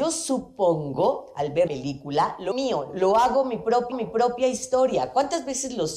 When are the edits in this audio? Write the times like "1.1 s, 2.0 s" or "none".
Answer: 1.7 s, 2.5 s, 2.9 s, 3.9 s

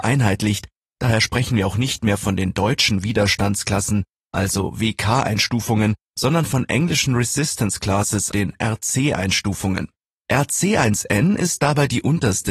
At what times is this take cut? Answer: 8.3 s

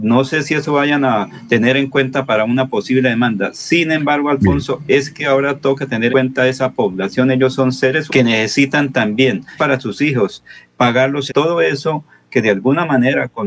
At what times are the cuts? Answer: 6.1 s, 8.1 s, 9.6 s, 11.3 s

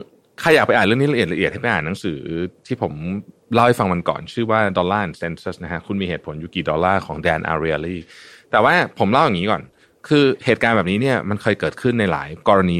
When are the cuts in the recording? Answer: none

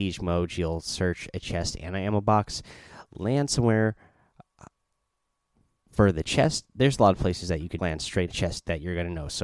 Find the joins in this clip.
7.8 s, 8.3 s

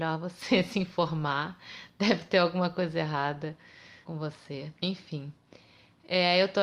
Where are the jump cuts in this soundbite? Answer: 4.0 s, 4.8 s

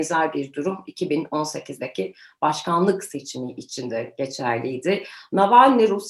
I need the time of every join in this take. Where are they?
none

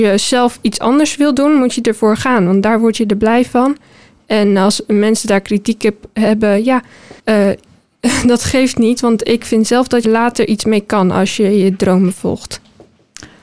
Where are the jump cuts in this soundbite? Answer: 7.2 s, 10.0 s

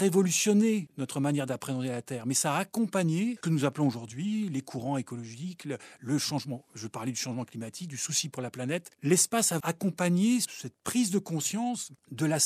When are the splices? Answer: 3.4 s, 9.6 s

